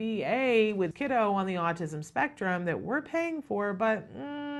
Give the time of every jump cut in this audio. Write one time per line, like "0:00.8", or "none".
0:00.9